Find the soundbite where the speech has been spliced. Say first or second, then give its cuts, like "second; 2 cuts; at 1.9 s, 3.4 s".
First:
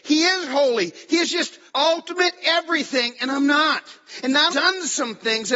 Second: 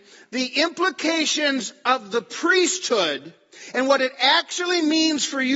first; 2 cuts; at 1.7 s, 4.5 s